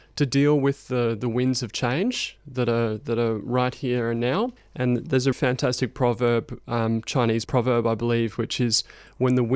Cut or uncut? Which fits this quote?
cut